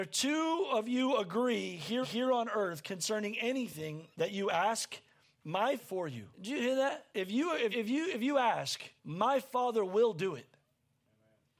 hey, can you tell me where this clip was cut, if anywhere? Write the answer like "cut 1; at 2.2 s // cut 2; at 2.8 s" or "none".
cut 1; at 2.0 s // cut 2; at 4.1 s // cut 3; at 5.8 s // cut 4; at 6.3 s // cut 5; at 7.1 s // cut 6; at 7.7 s // cut 7; at 9.0 s